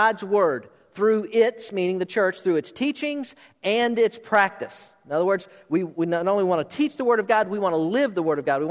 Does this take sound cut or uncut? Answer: uncut